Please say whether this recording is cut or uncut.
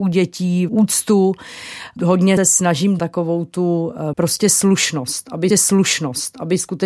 cut